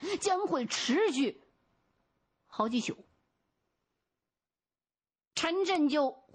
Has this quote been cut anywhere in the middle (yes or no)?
no